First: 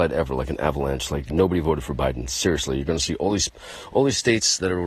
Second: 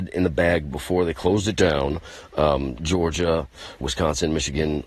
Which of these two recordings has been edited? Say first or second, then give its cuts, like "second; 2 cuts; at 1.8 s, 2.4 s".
second; 1 cut; at 3.8 s